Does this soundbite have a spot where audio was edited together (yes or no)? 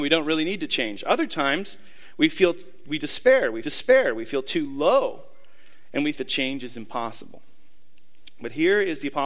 yes